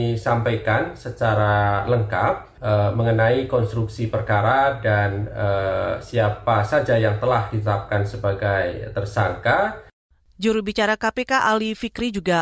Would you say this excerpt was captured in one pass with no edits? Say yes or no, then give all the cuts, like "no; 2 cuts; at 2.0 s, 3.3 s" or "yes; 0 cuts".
yes; 0 cuts